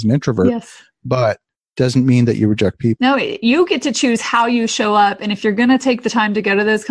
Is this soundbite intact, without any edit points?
yes; 0 cuts

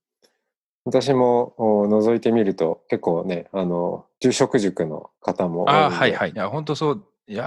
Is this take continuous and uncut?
no; 3 cuts; at 4.1 s, 5.1 s, 6.3 s

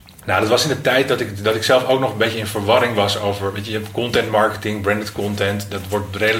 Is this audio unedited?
yes; 0 cuts

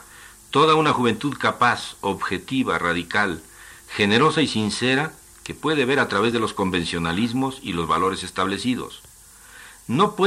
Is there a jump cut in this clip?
no; 0 cuts

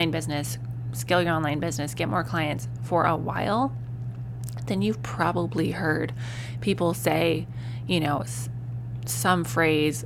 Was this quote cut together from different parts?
no; 0 cuts

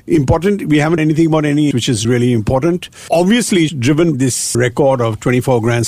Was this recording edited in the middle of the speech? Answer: yes; 6 cuts; at 1.0 s, 1.7 s, 2.0 s, 3.7 s, 4.1 s, 4.5 s

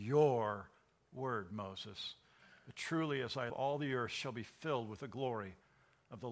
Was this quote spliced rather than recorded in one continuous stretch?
yes; 1 cut; at 3.5 s

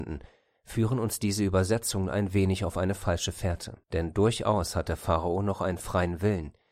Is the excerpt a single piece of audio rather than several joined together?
no; 1 cut; at 3.8 s

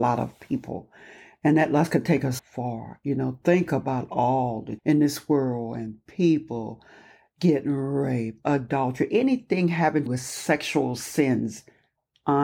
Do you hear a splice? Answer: yes; 3 cuts; at 2.4 s, 4.8 s, 10.1 s

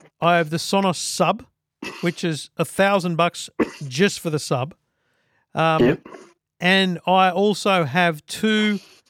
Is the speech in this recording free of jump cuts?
yes; 0 cuts

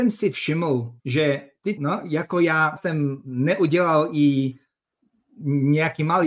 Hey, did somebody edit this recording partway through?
yes; 3 cuts; at 1.0 s, 1.8 s, 2.8 s

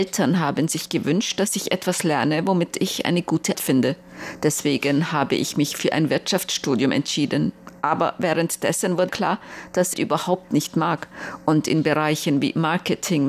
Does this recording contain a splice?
yes; 3 cuts; at 3.5 s, 9.1 s, 9.9 s

